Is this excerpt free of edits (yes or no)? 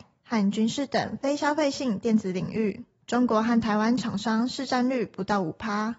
yes